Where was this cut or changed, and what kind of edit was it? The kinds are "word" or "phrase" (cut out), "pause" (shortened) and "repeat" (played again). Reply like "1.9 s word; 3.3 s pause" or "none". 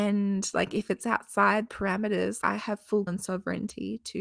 1.7 s word; 2.4 s word; 3.1 s word